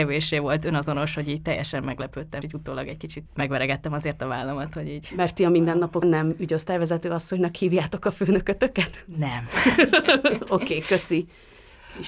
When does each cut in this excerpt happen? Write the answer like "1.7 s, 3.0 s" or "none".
2.4 s, 3.3 s, 6.0 s